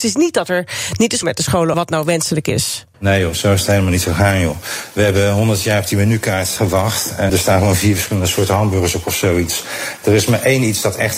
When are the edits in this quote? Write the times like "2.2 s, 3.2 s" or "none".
1.2 s, 1.7 s, 2.9 s, 6.6 s, 7.3 s